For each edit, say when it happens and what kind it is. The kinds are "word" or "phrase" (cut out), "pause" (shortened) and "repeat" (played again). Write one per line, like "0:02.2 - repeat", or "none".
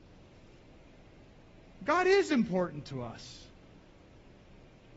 none